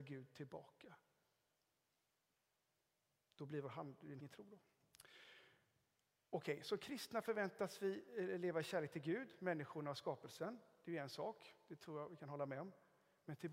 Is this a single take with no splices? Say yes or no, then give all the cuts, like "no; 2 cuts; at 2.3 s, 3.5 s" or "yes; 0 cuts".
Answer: no; 1 cut; at 4.2 s